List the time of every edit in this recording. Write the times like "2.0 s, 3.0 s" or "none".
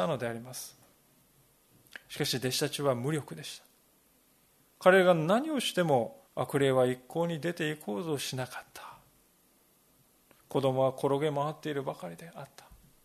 6.3 s